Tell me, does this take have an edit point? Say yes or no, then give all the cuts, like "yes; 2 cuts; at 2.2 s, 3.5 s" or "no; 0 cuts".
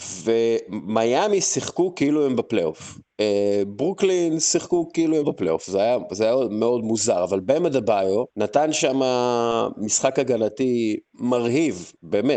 yes; 3 cuts; at 5.2 s, 8.3 s, 11.1 s